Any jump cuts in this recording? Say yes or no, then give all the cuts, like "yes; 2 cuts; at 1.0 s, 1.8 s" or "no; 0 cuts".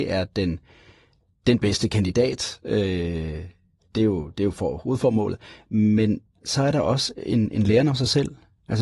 no; 0 cuts